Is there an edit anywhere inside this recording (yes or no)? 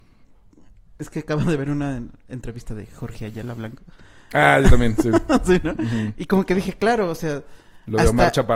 no